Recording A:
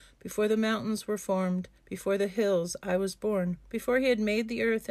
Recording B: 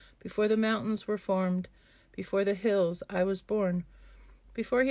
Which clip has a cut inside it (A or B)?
A